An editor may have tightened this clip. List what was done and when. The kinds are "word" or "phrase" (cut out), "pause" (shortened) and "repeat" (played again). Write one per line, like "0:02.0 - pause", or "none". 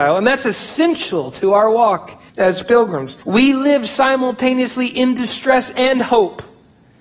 0:02.3 - pause
0:03.2 - pause